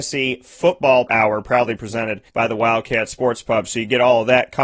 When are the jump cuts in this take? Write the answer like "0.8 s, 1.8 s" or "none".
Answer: 1.1 s, 2.3 s

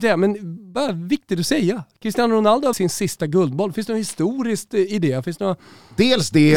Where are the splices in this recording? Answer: 2.7 s

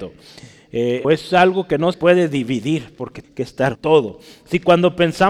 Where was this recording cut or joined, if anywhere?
1.0 s, 1.9 s, 3.2 s, 3.7 s

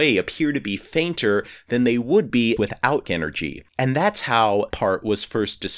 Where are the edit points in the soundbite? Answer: 2.6 s, 3.0 s, 3.7 s, 4.7 s

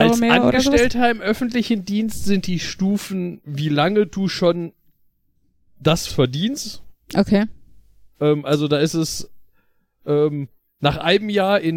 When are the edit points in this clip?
6.1 s

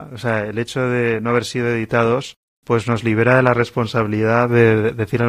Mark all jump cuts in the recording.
none

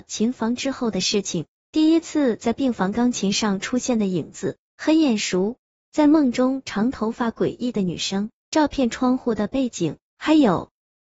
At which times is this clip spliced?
none

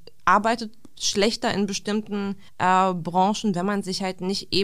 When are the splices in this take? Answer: 2.5 s

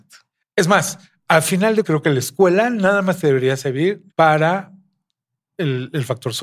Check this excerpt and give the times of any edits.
1.8 s, 4.1 s

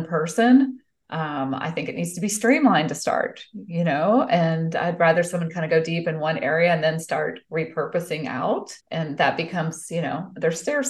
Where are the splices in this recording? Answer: 8.8 s

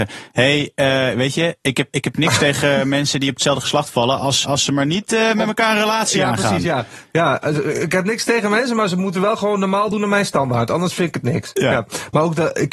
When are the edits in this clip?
1.9 s, 4.4 s

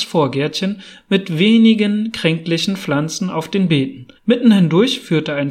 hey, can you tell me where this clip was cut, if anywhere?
4.2 s

